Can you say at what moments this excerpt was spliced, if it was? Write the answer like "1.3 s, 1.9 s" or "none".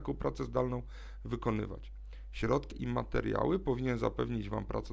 2.7 s

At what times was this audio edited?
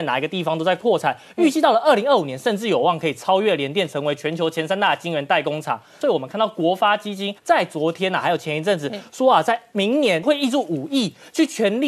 7.4 s

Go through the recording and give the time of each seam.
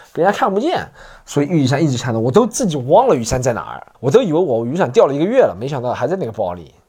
3.9 s

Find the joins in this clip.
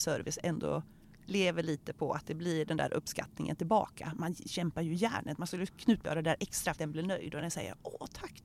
6.0 s, 6.8 s

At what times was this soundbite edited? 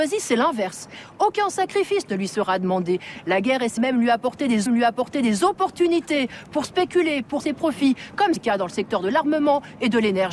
3.8 s, 4.7 s, 7.4 s, 8.4 s

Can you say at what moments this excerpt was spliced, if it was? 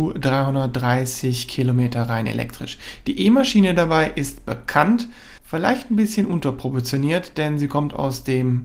5.4 s

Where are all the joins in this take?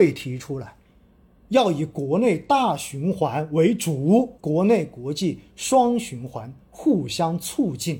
4.4 s

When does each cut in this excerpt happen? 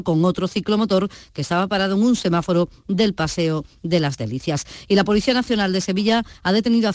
none

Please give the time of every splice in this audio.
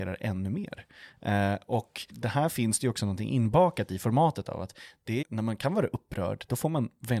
2.1 s, 5.2 s

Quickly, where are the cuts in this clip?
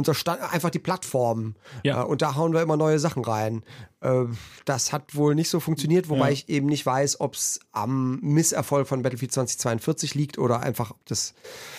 none

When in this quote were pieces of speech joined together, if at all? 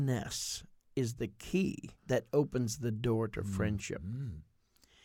2.0 s

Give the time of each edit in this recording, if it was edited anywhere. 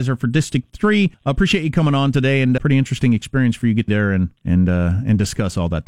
1.1 s, 2.6 s, 3.9 s, 4.4 s

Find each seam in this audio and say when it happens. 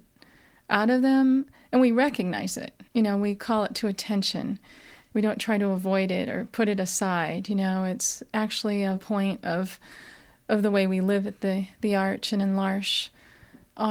2.9 s

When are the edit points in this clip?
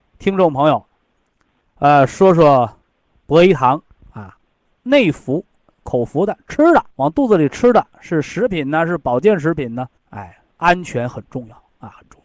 6.9 s, 10.0 s

